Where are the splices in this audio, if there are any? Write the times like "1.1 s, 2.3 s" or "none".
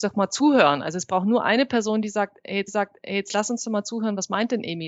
2.7 s